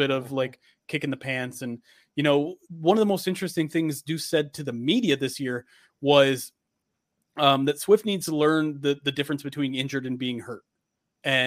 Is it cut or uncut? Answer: uncut